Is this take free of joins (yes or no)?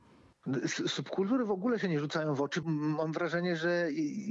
no